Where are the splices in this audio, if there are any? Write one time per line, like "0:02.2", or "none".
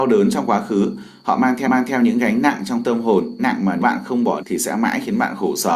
0:01.6
0:03.4
0:03.8
0:04.4